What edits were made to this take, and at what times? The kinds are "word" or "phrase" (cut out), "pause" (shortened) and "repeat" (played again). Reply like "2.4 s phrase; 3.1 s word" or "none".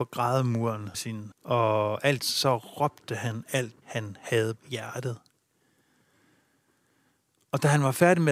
0.9 s word; 1.3 s word; 2.2 s word; 3.8 s word; 4.6 s word

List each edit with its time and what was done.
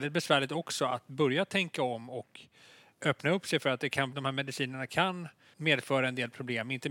4.1 s word

